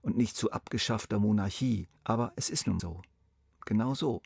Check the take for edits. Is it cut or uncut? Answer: cut